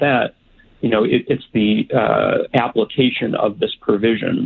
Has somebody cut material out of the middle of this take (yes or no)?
no